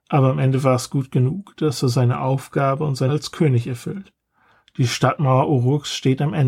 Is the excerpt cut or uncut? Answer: cut